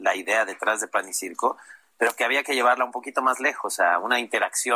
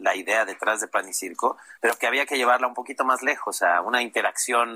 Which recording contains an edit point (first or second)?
second